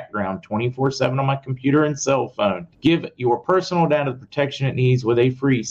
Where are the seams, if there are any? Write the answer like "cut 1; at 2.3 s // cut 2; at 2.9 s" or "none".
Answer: cut 1; at 2.7 s